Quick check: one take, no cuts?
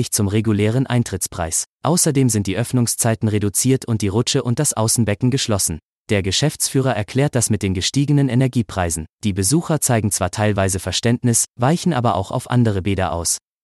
no; 2 cuts; at 5.9 s, 9.1 s

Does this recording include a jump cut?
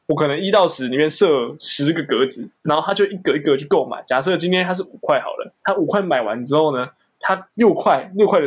yes; 2 cuts; at 2.6 s, 5.5 s

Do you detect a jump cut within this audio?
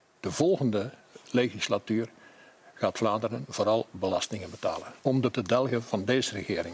yes; 2 cuts; at 5.0 s, 5.3 s

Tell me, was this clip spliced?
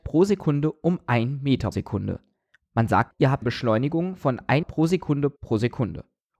yes; 5 cuts; at 1.7 s, 3.1 s, 3.4 s, 4.6 s, 5.4 s

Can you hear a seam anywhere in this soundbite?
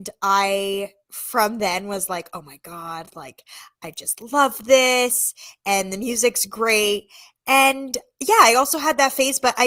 no; 0 cuts

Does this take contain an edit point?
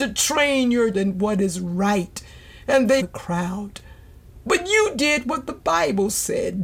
yes; 2 cuts; at 0.9 s, 3.0 s

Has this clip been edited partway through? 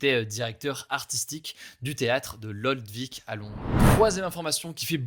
no; 0 cuts

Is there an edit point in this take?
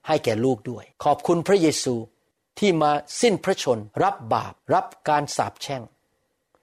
yes; 4 cuts; at 0.9 s, 2.3 s, 3.9 s, 4.6 s

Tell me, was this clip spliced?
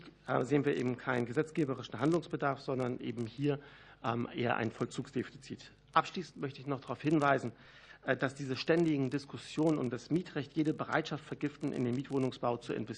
no; 0 cuts

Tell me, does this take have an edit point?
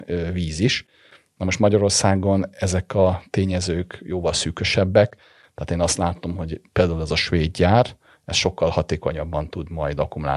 no; 0 cuts

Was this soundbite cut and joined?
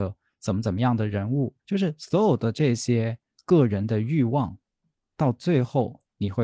yes; 1 cut; at 1.6 s

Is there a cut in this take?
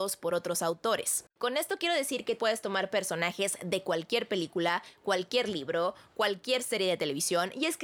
yes; 2 cuts; at 1.3 s, 2.4 s

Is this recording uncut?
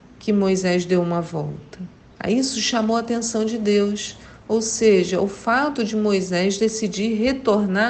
no; 1 cut; at 2.1 s

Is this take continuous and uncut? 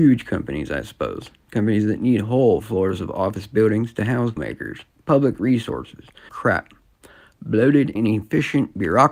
no; 3 cuts; at 4.4 s, 6.3 s, 8.0 s

